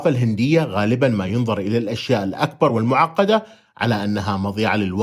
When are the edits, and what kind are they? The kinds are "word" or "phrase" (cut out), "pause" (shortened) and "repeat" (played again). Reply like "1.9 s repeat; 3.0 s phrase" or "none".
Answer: none